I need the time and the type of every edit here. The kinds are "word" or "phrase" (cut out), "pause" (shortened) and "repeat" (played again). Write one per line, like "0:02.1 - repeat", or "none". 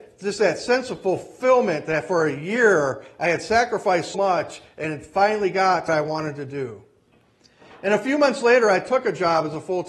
0:04.1 - word
0:05.9 - word